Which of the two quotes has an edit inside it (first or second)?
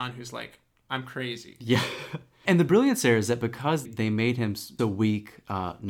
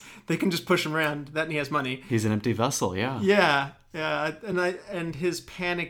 first